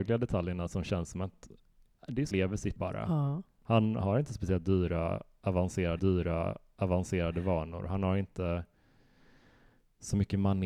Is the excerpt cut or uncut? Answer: cut